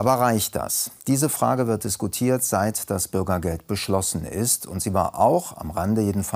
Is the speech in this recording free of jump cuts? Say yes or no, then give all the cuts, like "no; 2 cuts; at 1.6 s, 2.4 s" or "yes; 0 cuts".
no; 1 cut; at 1.0 s